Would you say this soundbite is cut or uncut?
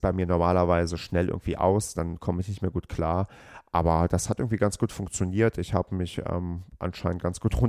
uncut